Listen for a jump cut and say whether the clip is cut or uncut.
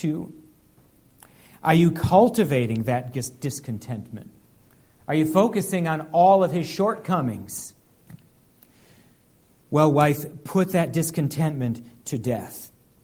uncut